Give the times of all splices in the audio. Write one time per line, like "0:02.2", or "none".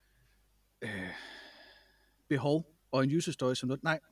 0:02.3
0:02.8